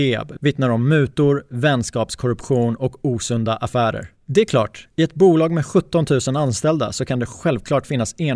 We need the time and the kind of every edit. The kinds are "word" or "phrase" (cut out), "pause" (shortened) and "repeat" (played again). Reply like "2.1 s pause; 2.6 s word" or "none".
4.1 s pause